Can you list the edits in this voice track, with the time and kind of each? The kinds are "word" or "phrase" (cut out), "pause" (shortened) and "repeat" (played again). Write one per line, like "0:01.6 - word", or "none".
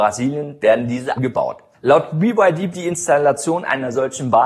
0:01.2 - word
0:02.7 - word